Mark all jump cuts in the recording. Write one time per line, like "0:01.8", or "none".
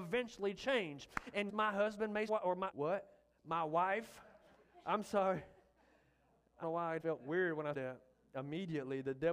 0:01.5
0:02.3
0:02.7
0:06.6
0:07.0
0:07.7